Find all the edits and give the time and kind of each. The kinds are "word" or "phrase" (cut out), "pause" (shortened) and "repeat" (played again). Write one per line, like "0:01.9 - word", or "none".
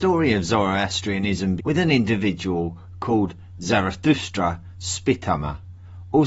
0:01.6 - word